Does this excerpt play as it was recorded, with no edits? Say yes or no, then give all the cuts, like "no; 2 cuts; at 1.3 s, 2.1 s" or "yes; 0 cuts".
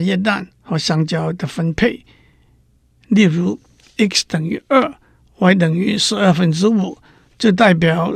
yes; 0 cuts